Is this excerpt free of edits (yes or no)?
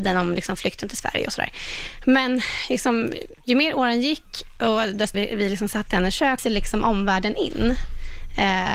no